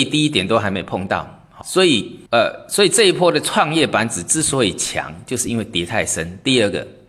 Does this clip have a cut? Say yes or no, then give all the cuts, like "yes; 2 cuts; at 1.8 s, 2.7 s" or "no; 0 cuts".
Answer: yes; 2 cuts; at 1.6 s, 2.3 s